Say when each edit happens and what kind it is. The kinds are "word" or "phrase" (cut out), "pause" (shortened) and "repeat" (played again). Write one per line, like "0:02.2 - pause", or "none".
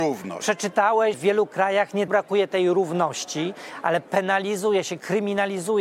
0:01.1 - word
0:02.1 - word